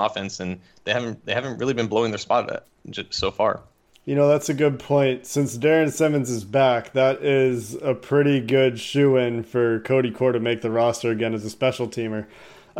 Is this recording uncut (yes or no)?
yes